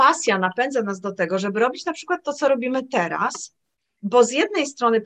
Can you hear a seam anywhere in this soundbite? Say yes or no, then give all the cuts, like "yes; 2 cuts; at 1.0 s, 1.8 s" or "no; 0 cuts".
no; 0 cuts